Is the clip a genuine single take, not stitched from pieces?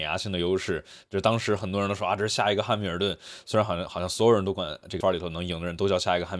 no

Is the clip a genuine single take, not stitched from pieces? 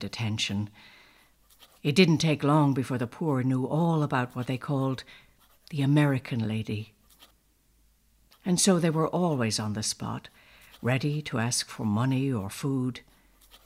yes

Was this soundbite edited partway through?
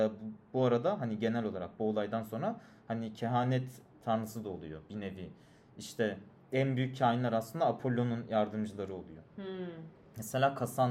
no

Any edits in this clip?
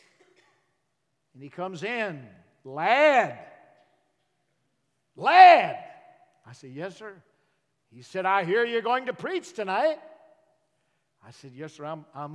no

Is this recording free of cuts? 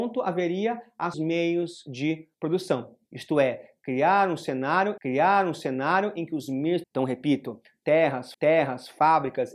no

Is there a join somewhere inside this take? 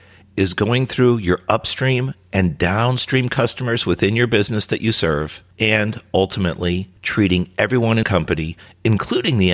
yes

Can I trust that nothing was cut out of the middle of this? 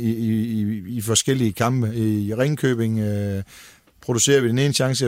yes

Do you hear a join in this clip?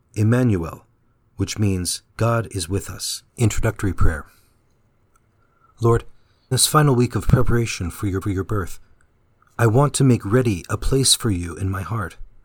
yes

